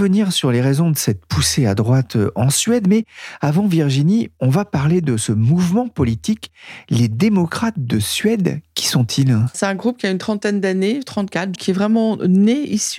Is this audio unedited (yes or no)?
no